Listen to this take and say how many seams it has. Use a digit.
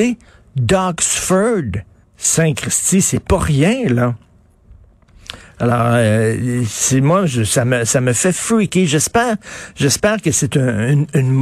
1